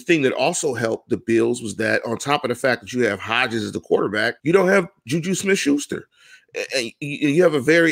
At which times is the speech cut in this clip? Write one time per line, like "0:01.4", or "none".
0:04.4